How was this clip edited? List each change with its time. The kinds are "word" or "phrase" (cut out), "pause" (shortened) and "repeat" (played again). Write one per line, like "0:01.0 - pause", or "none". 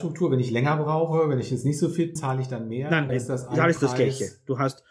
0:02.2 - word
0:03.1 - word

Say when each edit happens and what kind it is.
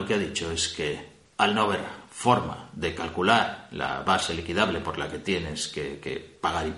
none

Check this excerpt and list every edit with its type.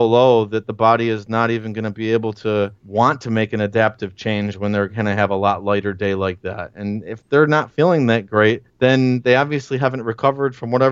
0:02.8 - pause
0:08.7 - pause

